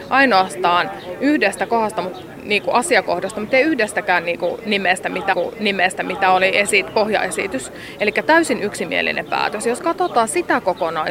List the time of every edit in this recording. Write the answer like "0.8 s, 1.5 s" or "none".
5.3 s